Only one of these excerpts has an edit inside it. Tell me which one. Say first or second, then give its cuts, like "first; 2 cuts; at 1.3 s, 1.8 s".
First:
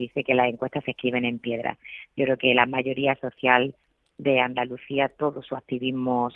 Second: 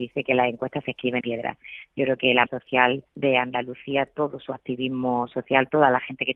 second; 3 cuts; at 1.2 s, 2.5 s, 3.1 s